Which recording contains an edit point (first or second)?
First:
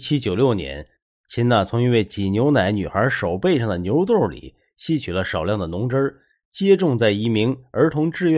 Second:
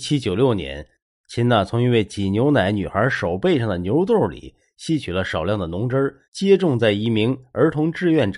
second